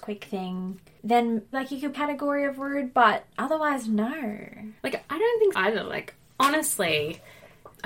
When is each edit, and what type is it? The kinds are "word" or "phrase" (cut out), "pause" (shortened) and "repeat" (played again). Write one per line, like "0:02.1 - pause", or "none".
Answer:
0:01.5 - word
0:01.9 - phrase
0:04.8 - pause
0:05.5 - word